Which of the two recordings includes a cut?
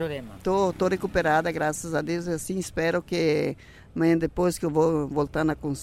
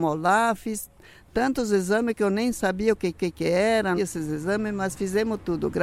second; 2 cuts; at 3.1 s, 4.0 s

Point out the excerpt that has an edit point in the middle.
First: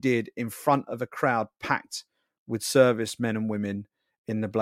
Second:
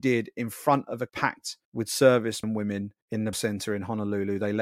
second; 5 cuts; at 1.1 s, 1.6 s, 2.4 s, 3.0 s, 3.3 s

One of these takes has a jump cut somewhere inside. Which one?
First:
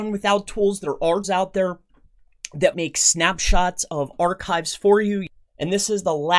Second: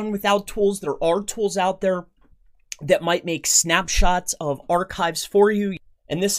first; 2 cuts; at 1.2 s, 2.7 s

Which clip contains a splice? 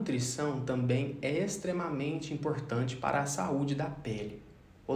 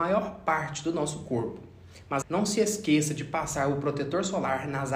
second; 1 cut; at 2.2 s

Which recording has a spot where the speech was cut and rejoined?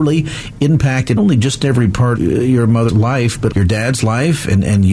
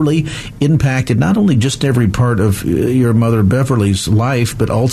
first; 4 cuts; at 1.2 s, 2.2 s, 2.9 s, 3.5 s

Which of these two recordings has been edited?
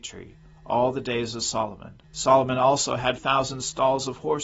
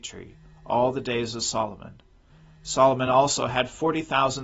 first; 2 cuts; at 2.0 s, 3.2 s

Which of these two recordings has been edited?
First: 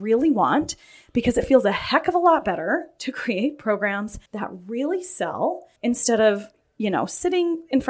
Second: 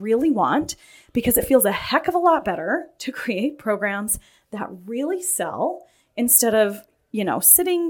first; 2 cuts; at 4.3 s, 5.8 s

